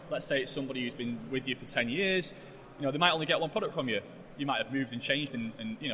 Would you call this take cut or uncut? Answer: uncut